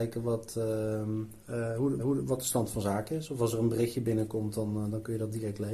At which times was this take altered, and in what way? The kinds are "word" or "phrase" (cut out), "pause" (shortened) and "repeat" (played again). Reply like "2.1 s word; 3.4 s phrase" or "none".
2.0 s repeat